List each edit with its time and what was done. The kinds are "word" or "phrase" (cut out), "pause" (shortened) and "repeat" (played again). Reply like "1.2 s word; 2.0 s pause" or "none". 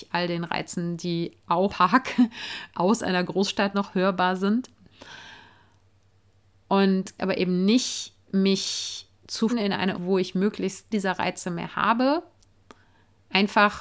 1.7 s word; 2.7 s word; 3.7 s word; 7.2 s word; 9.5 s word; 9.9 s word; 10.9 s word